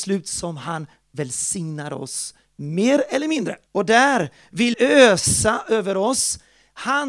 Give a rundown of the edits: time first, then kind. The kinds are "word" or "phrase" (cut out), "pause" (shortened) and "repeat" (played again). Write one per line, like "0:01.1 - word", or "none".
0:03.7 - pause
0:04.7 - word